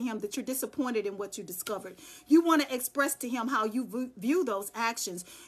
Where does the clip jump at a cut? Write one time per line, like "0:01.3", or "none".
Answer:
none